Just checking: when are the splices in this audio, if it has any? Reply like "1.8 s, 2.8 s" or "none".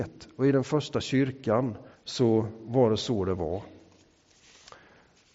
1.9 s